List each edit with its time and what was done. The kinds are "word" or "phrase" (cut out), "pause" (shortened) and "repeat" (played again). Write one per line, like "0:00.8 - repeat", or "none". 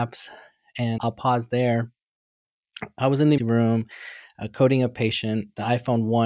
0:01.0 - word
0:03.4 - word